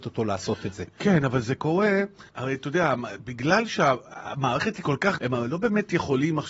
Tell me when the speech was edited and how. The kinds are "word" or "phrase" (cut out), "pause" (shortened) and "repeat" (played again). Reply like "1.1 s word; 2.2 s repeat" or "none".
2.3 s pause; 5.2 s word